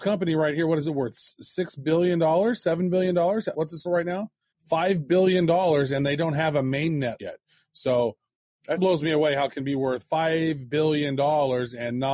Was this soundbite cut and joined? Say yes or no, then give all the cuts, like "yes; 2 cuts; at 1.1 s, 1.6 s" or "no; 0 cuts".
yes; 5 cuts; at 3.5 s, 3.8 s, 7.2 s, 8.8 s, 9.5 s